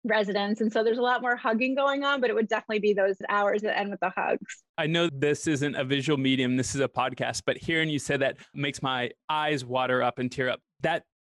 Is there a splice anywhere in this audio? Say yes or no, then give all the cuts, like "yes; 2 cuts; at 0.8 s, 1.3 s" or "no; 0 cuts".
yes; 1 cut; at 4.7 s